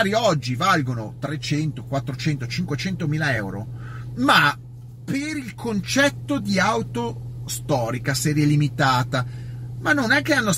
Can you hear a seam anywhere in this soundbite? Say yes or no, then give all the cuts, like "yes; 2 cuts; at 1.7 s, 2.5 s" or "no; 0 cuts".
no; 0 cuts